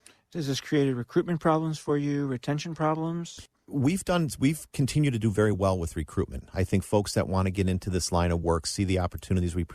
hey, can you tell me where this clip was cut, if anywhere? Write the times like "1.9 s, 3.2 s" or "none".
none

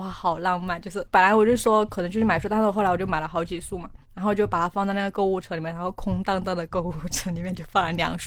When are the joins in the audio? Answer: 4.0 s

